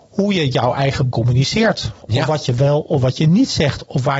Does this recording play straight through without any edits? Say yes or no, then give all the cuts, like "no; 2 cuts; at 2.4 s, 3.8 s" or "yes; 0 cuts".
no; 1 cut; at 1.1 s